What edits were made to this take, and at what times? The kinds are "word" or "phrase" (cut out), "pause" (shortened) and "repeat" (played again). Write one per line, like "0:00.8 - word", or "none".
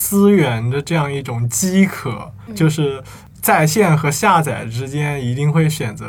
0:02.5 - word